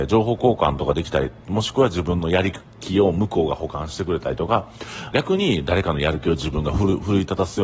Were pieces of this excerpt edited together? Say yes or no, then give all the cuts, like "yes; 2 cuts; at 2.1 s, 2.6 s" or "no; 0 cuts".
yes; 1 cut; at 5.1 s